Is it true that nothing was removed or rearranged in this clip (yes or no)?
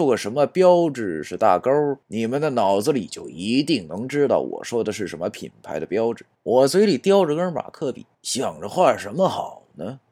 no